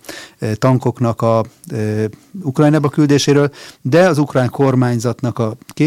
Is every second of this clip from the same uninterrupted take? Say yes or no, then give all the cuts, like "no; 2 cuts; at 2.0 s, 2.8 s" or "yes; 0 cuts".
yes; 0 cuts